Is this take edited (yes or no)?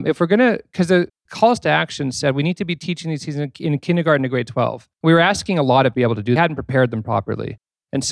yes